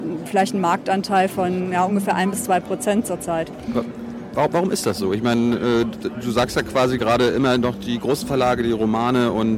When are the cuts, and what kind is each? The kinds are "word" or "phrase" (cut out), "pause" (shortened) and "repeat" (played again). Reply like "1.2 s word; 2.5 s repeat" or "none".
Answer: none

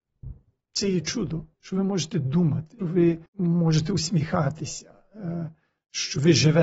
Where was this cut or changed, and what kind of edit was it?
1.5 s pause; 2.8 s word; 3.3 s pause

